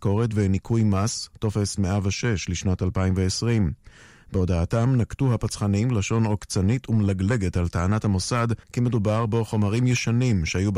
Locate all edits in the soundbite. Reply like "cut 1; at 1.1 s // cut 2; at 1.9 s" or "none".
cut 1; at 8.6 s